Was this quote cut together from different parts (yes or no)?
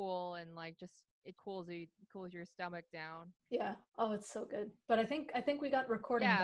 yes